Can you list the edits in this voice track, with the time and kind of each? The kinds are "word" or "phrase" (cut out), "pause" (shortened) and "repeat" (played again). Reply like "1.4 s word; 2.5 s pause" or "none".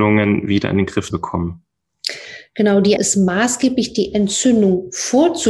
1.1 s word; 3.0 s word